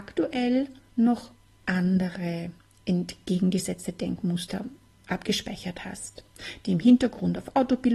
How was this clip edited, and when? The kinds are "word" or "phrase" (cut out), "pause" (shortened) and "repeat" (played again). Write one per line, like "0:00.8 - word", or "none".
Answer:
none